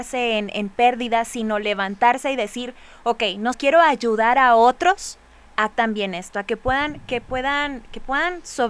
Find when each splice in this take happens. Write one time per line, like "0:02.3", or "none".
0:03.5
0:05.7